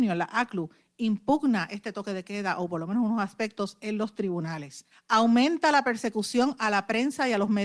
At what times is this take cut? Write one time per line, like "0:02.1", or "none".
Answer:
0:04.9